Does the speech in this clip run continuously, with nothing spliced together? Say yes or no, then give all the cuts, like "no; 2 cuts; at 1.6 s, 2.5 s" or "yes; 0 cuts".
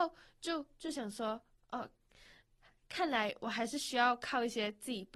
yes; 0 cuts